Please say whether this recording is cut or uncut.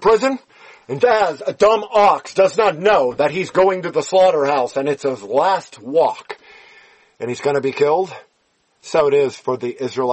cut